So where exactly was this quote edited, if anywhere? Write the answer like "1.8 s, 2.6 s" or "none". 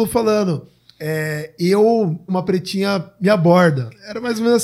2.3 s

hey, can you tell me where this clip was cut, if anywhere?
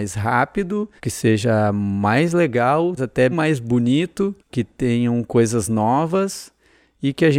1.0 s, 3.0 s, 3.3 s, 4.4 s

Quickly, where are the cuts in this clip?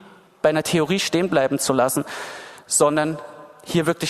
none

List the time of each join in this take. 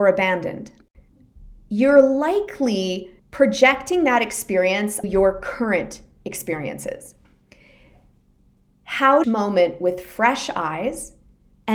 3.2 s, 5.0 s, 9.2 s

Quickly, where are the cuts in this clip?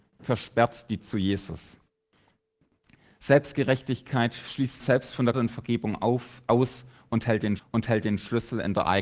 1.0 s, 4.8 s, 5.3 s, 7.6 s

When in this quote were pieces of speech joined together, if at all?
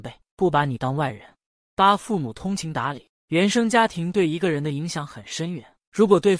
none

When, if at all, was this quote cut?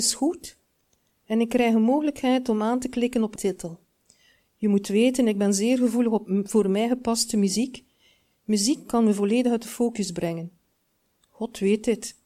3.4 s

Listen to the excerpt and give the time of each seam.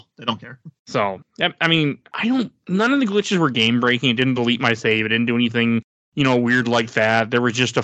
none

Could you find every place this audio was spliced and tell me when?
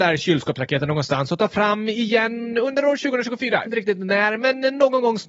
3.7 s

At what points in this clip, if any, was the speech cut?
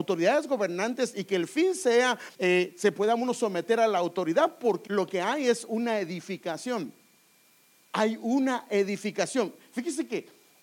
2.3 s, 4.9 s

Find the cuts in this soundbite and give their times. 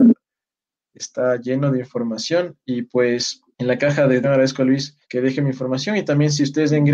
3.5 s, 4.2 s, 5.0 s

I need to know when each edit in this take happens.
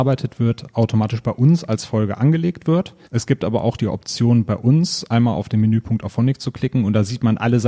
3.0 s

